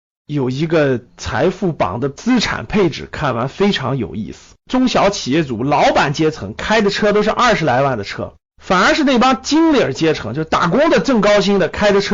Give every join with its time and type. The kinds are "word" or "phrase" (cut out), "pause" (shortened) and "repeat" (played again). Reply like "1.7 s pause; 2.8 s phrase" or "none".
4.6 s pause; 8.4 s pause